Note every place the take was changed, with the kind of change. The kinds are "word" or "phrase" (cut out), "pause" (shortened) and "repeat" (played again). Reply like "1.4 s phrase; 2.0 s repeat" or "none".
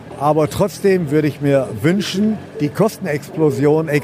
none